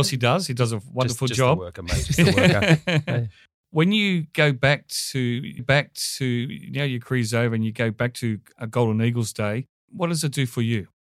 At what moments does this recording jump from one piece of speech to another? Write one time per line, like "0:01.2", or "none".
0:05.6